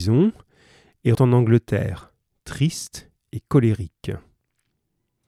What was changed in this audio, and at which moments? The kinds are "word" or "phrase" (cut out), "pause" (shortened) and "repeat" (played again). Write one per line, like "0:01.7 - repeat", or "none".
0:01.1 - word